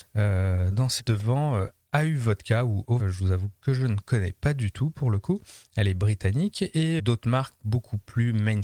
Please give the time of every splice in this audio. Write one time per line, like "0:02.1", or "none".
0:01.0
0:03.0
0:07.0